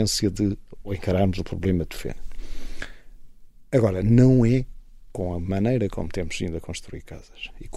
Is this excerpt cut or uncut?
uncut